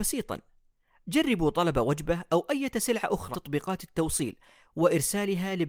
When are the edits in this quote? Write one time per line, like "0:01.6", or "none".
0:03.3